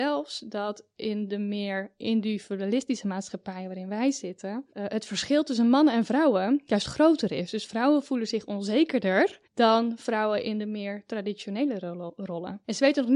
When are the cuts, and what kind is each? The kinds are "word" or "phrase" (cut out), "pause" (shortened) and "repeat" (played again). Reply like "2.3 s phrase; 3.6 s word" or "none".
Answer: 4.7 s pause; 9.4 s pause